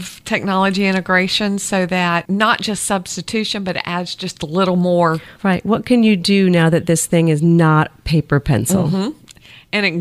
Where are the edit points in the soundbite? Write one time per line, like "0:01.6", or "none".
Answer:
0:05.3